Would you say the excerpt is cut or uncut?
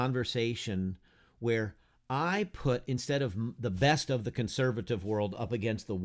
uncut